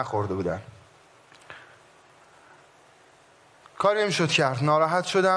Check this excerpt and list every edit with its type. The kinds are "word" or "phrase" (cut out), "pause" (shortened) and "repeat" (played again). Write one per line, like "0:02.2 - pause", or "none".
none